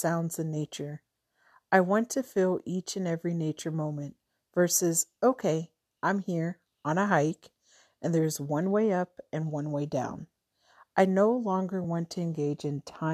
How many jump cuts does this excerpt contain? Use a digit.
0